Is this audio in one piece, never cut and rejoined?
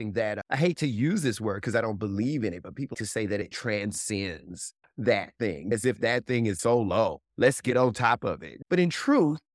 no; 2 cuts; at 2.9 s, 7.2 s

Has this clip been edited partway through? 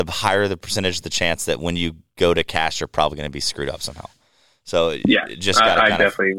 no; 0 cuts

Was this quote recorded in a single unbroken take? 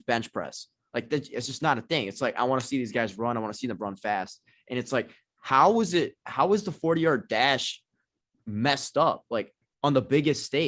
yes; 0 cuts

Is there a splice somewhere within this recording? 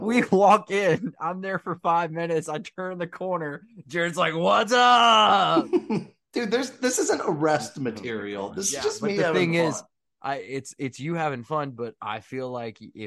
no; 0 cuts

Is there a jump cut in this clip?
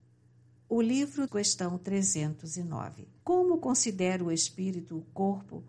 yes; 2 cuts; at 1.3 s, 3.2 s

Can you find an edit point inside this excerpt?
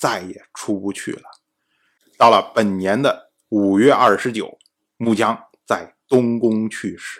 no; 0 cuts

